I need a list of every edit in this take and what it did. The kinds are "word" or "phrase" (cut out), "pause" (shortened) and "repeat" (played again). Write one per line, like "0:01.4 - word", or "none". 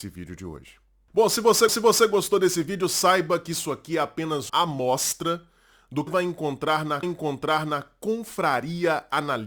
0:01.7 - repeat
0:04.5 - word
0:06.1 - word
0:07.0 - repeat